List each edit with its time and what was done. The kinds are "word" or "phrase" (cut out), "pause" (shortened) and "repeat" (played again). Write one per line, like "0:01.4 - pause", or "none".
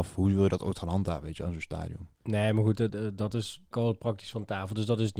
0:02.1 - pause
0:02.9 - word
0:03.7 - word

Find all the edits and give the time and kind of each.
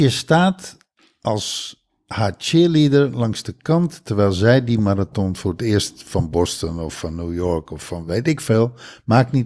none

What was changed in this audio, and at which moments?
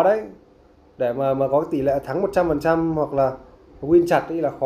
none

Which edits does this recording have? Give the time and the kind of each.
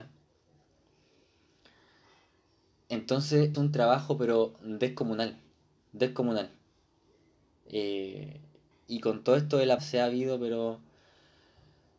0:03.5 - word
0:08.7 - word
0:09.8 - word

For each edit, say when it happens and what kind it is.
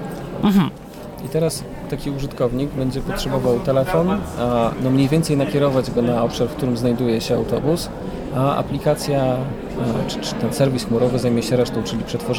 none

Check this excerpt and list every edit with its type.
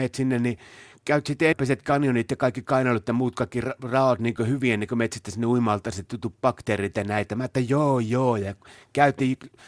0:01.5 - phrase

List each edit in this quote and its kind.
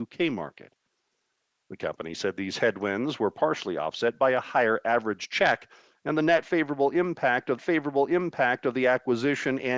0:07.6 - repeat

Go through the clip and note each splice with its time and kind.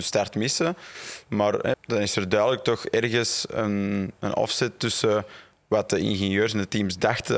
0:01.7 - phrase

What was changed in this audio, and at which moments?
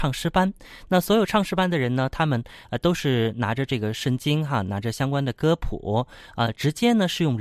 none

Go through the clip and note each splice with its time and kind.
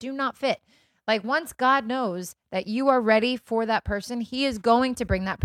none

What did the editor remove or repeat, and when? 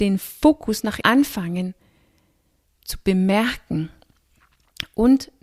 0:01.0 - phrase

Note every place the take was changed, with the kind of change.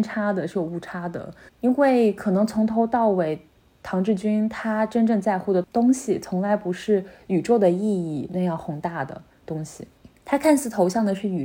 0:01.5 - pause

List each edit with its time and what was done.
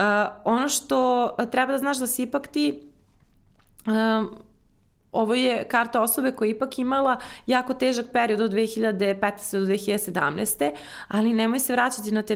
none

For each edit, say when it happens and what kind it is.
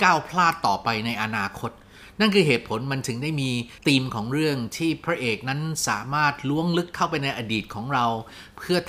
0:03.8 - pause

